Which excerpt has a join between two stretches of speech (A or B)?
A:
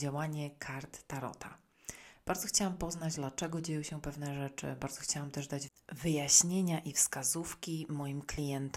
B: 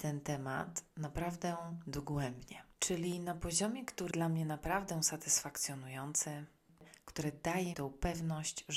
B